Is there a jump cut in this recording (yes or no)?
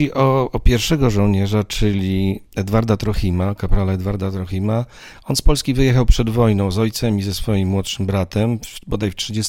no